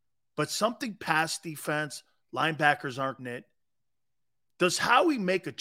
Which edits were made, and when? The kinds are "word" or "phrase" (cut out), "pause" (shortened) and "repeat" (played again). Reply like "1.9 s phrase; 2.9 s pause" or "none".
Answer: 3.2 s word